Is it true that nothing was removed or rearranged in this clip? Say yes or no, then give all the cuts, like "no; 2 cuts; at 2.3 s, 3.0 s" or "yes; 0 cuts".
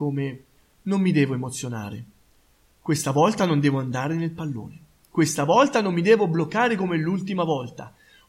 yes; 0 cuts